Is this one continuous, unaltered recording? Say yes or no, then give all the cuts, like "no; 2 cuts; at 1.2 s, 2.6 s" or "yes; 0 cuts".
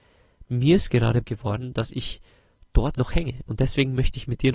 no; 2 cuts; at 1.2 s, 2.9 s